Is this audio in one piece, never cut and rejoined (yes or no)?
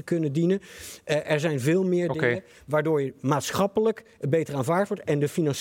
yes